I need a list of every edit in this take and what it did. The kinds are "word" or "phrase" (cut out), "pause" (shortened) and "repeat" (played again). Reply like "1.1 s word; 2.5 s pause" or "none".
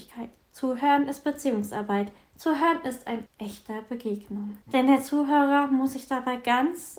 3.3 s word; 4.6 s pause